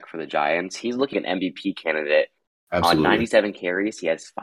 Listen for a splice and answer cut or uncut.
cut